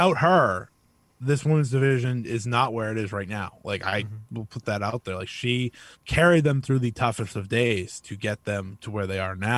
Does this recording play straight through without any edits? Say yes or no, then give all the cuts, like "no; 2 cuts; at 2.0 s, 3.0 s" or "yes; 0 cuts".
no; 1 cut; at 6.0 s